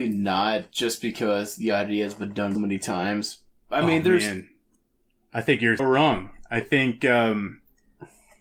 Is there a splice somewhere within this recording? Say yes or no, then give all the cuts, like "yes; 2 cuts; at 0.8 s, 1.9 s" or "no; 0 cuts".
yes; 2 cuts; at 2.6 s, 5.8 s